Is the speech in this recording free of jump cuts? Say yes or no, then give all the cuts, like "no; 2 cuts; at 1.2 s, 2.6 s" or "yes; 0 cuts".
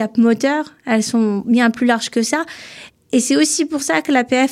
yes; 0 cuts